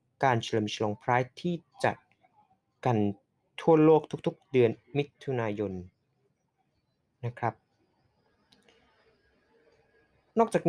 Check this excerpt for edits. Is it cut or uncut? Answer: uncut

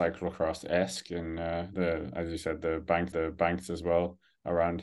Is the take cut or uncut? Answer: cut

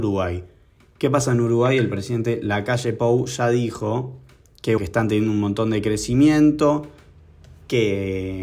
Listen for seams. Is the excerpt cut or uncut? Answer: cut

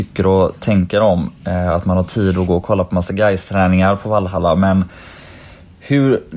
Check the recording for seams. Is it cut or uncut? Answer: uncut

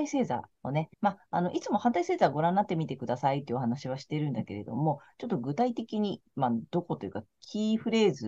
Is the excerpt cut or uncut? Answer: cut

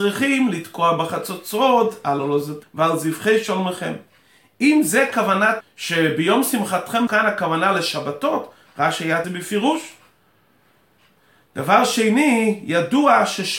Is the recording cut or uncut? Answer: cut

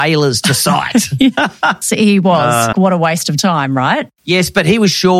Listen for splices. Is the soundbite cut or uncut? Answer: cut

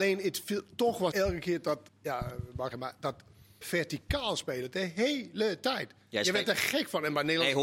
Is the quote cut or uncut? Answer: cut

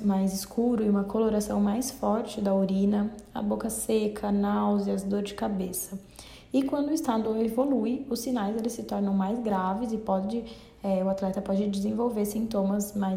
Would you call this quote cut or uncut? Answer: uncut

